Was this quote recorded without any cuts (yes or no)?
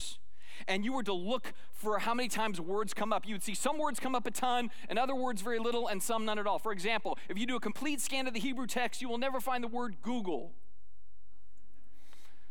yes